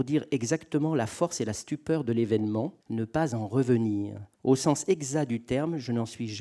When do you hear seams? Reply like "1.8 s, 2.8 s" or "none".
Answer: 2.8 s, 4.3 s